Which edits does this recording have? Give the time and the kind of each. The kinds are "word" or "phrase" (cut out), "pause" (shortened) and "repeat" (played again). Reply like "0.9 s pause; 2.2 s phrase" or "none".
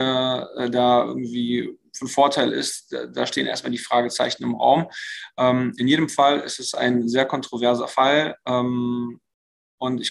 none